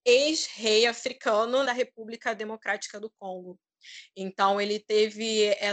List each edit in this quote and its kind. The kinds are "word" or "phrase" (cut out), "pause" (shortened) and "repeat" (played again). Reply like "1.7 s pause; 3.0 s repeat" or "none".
1.6 s word